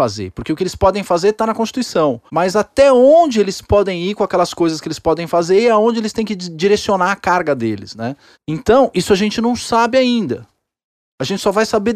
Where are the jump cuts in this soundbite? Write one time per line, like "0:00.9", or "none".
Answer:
0:02.3
0:08.3